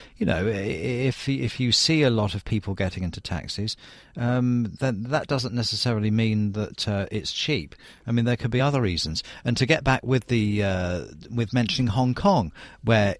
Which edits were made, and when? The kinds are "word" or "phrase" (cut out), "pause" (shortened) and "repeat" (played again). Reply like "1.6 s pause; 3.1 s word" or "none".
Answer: none